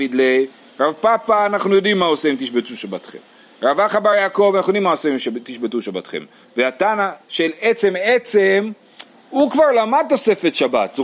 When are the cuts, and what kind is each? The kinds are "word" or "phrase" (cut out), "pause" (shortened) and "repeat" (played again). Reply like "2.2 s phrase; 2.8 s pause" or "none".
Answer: none